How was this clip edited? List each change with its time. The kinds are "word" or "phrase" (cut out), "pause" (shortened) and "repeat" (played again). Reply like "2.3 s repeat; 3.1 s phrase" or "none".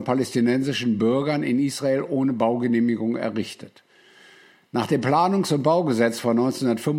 none